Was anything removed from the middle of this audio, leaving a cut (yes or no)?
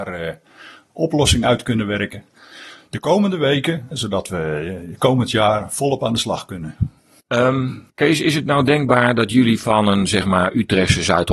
yes